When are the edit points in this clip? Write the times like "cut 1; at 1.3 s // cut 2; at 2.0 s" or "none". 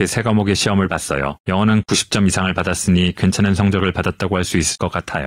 cut 1; at 1.4 s